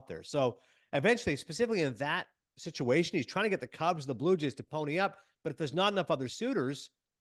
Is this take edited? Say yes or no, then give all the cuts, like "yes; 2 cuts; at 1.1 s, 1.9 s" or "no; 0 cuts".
no; 0 cuts